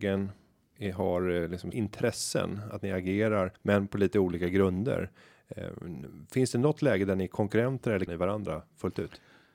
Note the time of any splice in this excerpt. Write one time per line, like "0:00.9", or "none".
0:01.7
0:03.5
0:08.1

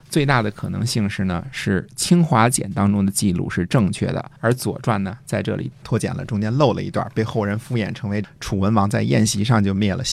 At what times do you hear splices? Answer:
0:04.3

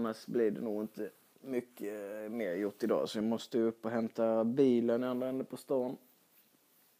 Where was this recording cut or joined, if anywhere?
none

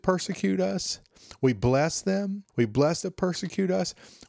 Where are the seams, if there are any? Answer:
0:02.5
0:03.0

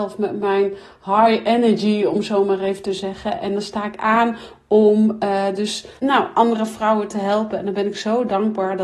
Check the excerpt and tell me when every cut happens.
0:06.0

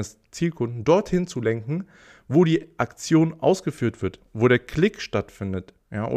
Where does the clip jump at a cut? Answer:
none

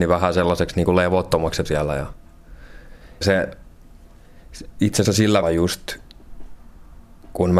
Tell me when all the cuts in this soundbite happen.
0:01.7
0:03.2
0:05.0
0:05.4

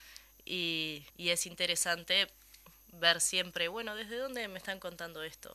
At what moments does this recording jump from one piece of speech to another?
0:01.1

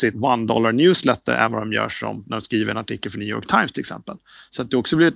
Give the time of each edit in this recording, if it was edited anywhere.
none

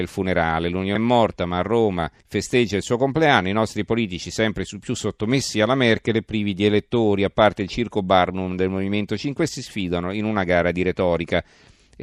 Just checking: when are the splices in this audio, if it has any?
0:01.0
0:02.2
0:09.5

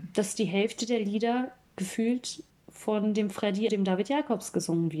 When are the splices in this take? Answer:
0:02.5
0:03.7

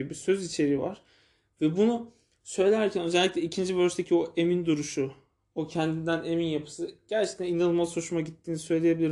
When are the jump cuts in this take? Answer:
none

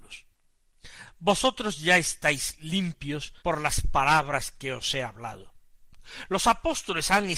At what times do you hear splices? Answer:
0:03.4

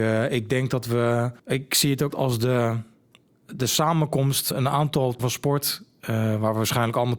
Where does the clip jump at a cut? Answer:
0:01.4
0:02.1
0:04.5
0:05.2

